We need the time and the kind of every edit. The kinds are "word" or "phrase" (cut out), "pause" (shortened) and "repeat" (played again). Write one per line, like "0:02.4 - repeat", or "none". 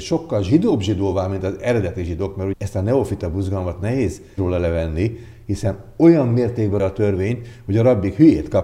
0:02.5 - word
0:04.4 - word
0:06.8 - word